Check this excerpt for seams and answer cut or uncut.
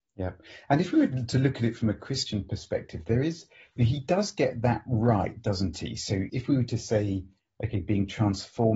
uncut